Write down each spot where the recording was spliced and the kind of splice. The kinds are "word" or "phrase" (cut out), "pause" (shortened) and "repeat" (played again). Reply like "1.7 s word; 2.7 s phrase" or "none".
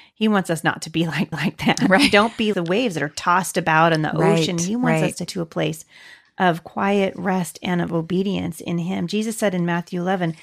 1.3 s repeat; 2.5 s word; 5.3 s word